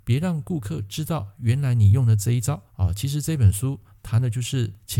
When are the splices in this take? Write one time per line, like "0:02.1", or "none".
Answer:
0:02.7